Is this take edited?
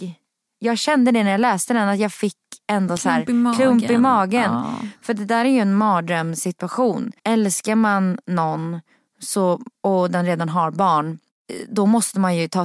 yes; 2 cuts; at 7.2 s, 9.7 s

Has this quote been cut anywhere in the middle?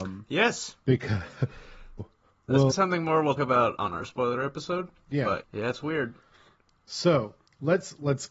yes; 5 cuts; at 2.0 s, 2.7 s, 3.4 s, 3.8 s, 5.4 s

